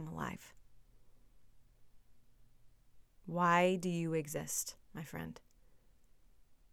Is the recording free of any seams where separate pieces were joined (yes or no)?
no